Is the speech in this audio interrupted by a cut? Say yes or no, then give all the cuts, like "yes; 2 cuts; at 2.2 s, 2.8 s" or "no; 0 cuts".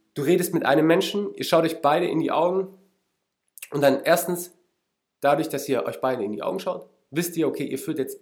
no; 0 cuts